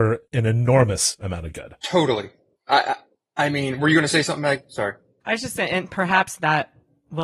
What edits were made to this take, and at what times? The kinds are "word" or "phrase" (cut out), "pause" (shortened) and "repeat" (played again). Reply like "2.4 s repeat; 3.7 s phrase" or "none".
none